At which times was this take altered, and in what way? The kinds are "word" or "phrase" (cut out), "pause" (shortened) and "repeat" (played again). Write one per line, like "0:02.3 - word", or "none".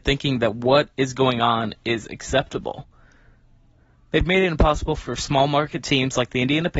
none